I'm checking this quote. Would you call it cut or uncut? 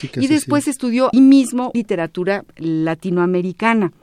cut